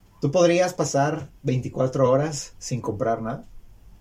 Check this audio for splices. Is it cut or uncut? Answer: uncut